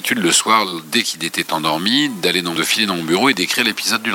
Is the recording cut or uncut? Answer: cut